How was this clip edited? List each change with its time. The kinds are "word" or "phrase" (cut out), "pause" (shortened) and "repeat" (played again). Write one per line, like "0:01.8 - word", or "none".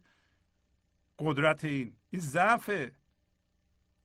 0:02.0 - pause